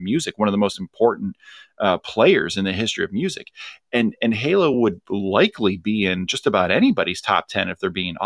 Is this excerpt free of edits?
yes; 0 cuts

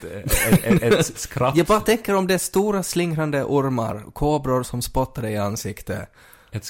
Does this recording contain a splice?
yes; 1 cut; at 1.1 s

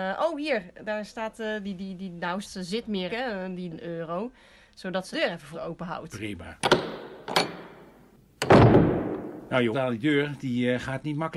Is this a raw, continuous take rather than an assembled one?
no; 7 cuts; at 1.6 s, 2.4 s, 3.1 s, 3.7 s, 5.1 s, 5.5 s, 9.7 s

